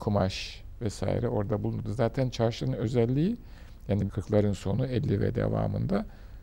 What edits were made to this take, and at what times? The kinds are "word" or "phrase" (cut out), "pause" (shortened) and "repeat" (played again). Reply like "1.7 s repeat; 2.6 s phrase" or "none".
4.1 s phrase

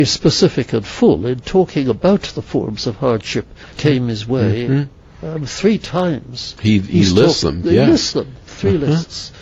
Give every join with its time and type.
3.7 s word; 7.4 s word; 8.1 s word

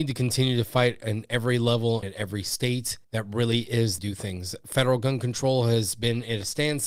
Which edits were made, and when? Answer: 2.0 s word; 3.0 s pause; 4.0 s phrase

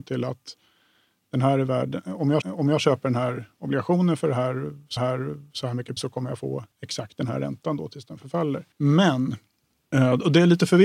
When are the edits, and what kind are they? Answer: 2.4 s repeat; 5.0 s repeat; 6.0 s word; 6.7 s pause; 8.7 s pause

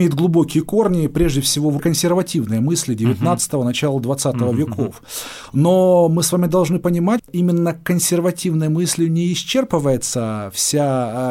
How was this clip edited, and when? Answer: 1.8 s word; 7.2 s word

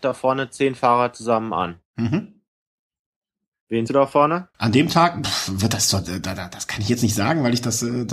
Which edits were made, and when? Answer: 3.9 s word; 4.5 s pause

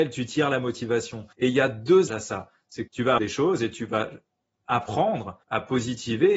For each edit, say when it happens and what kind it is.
1.3 s pause; 2.1 s word; 2.9 s word; 3.2 s word; 5.4 s pause

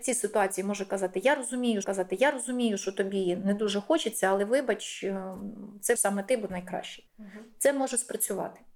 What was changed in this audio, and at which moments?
1.8 s repeat; 6.0 s word; 6.5 s phrase; 7.1 s pause

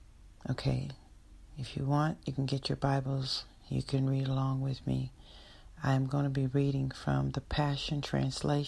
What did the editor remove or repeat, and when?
1.5 s pause

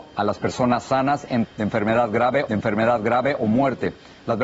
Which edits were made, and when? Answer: 1.4 s word; 2.5 s repeat

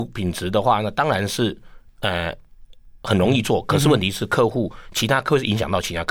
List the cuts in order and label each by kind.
3.0 s pause

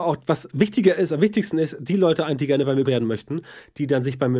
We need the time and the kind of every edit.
2.8 s word

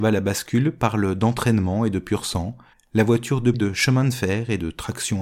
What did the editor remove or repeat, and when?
2.7 s pause; 3.5 s word

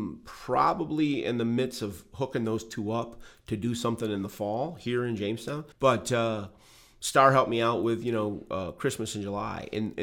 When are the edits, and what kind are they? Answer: 5.7 s pause

